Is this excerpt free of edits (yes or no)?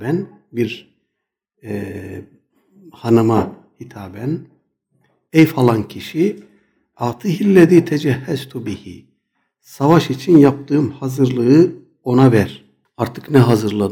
yes